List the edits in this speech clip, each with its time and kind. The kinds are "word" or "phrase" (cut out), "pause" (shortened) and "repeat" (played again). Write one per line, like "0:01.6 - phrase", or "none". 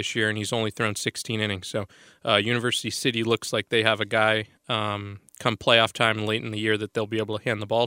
none